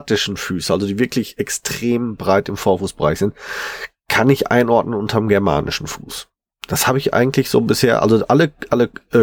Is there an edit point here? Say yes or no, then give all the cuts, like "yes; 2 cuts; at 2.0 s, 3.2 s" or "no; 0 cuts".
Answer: no; 0 cuts